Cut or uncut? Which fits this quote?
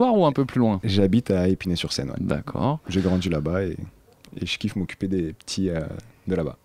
uncut